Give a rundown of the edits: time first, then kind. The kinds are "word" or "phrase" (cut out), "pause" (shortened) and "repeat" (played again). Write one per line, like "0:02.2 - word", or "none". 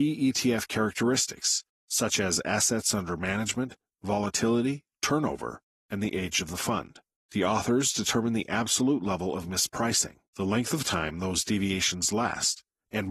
0:07.1 - pause
0:10.3 - pause